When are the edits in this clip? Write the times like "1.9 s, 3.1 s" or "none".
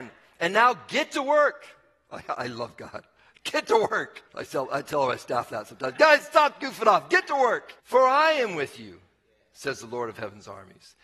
4.3 s, 7.8 s